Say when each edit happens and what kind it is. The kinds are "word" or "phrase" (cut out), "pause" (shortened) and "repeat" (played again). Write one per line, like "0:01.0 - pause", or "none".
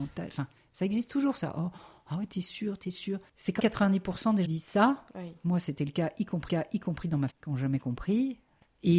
0:03.6 - word
0:04.4 - phrase
0:06.5 - repeat
0:07.3 - word